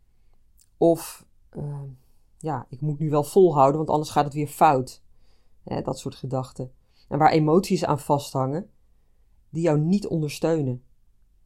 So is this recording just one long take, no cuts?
yes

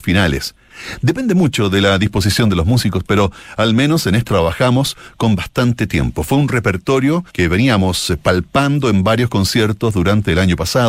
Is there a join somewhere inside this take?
yes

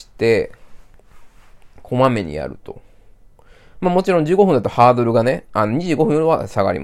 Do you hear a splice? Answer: no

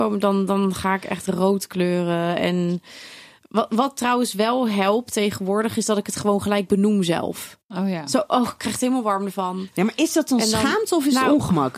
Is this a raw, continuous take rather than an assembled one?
yes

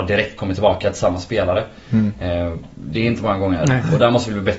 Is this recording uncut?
yes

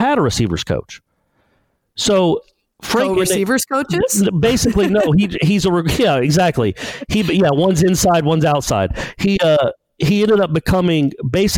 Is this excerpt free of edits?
yes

